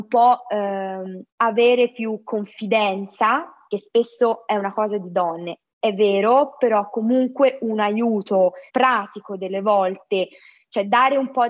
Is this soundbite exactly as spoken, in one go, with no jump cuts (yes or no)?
no